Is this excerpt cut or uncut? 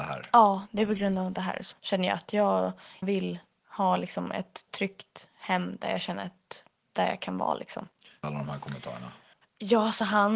cut